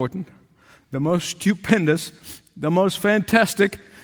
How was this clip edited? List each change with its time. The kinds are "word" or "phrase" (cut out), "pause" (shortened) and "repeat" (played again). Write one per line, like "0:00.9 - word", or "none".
none